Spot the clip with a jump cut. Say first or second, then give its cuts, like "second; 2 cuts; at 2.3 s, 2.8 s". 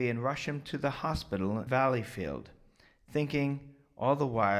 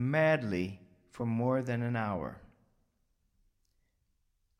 first; 1 cut; at 1.7 s